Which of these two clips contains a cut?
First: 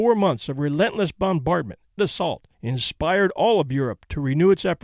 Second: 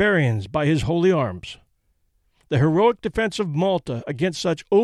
first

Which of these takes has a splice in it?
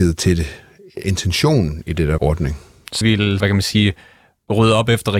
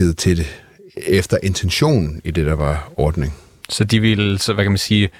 first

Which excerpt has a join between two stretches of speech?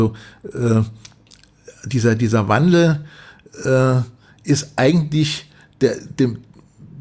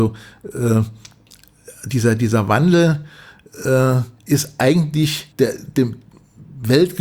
second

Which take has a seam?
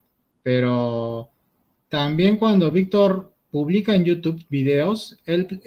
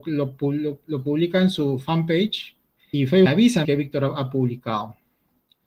second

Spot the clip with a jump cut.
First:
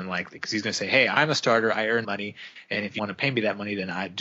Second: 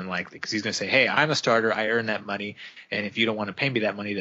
first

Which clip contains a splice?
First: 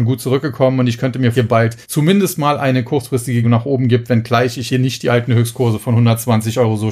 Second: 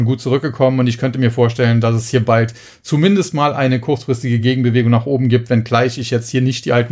first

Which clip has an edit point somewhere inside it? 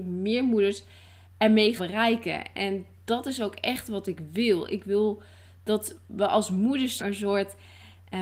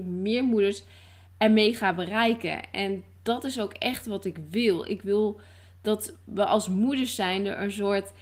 first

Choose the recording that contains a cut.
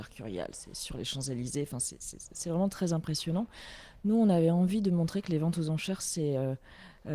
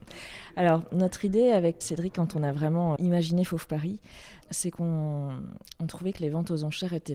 second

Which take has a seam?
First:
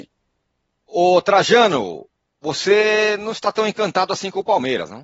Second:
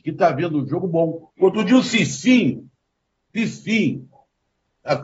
second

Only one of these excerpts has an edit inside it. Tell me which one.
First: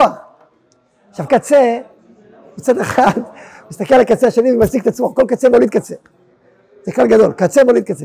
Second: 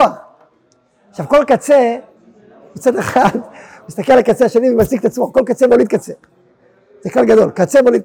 first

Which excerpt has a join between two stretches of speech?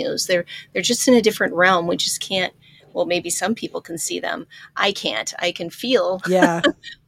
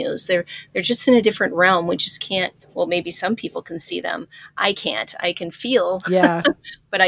second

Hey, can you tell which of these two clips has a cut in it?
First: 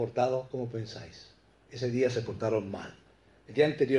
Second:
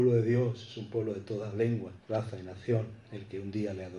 second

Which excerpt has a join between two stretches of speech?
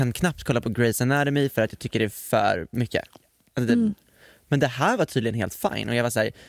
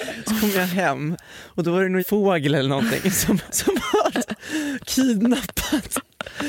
second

